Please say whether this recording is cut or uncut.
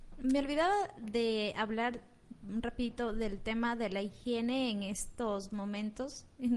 uncut